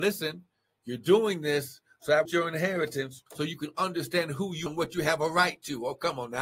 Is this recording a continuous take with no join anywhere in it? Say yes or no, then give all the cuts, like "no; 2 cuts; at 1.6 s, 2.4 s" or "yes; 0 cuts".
no; 3 cuts; at 2.2 s, 3.3 s, 4.7 s